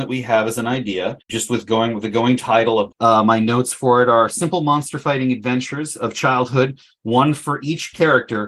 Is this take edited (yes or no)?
yes